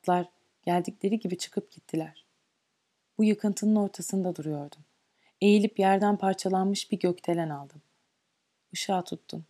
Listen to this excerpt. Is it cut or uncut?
uncut